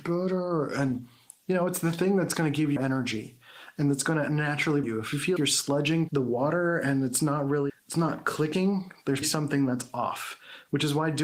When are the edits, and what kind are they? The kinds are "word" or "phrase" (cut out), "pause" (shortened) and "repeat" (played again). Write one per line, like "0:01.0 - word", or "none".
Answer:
0:02.8 - word
0:04.8 - word
0:05.4 - word
0:06.1 - word
0:07.7 - word
0:09.2 - word